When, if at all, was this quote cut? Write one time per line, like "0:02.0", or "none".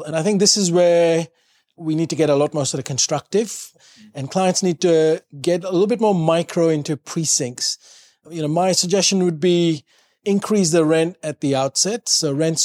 none